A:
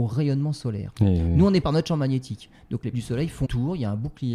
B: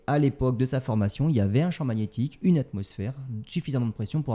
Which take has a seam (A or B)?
A